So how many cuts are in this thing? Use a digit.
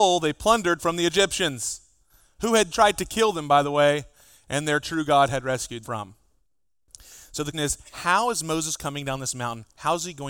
3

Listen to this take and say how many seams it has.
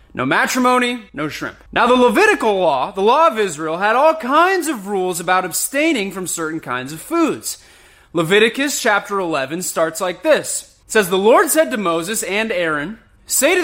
3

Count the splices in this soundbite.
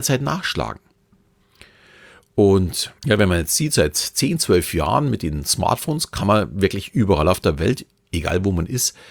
1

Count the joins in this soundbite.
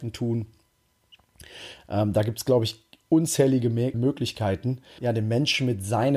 2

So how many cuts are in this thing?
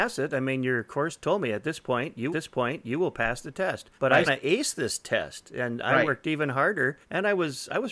4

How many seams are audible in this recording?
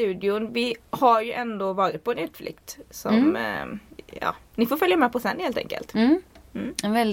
1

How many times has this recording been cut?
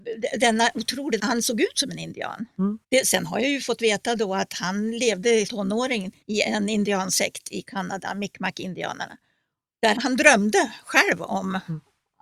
5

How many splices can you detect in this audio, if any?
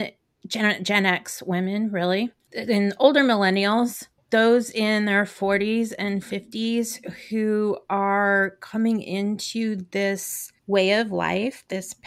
2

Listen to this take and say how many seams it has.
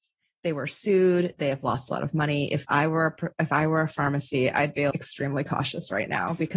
1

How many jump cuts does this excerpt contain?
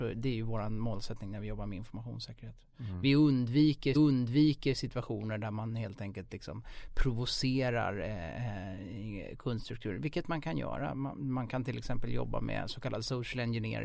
1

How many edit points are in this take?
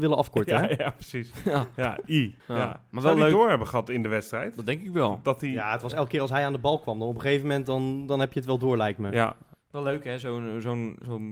1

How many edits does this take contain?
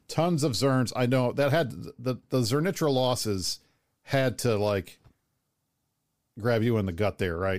0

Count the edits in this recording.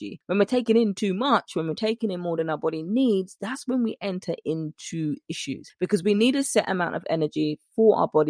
0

